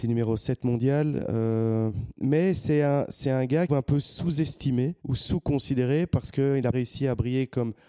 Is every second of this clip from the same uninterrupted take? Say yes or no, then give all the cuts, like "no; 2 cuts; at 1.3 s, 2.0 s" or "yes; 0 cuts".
no; 3 cuts; at 3.7 s, 5.0 s, 6.7 s